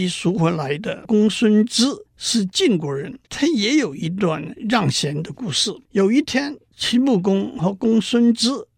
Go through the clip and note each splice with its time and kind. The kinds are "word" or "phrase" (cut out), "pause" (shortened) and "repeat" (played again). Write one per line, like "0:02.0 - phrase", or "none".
0:02.1 - pause
0:03.3 - pause
0:05.8 - pause
0:06.6 - pause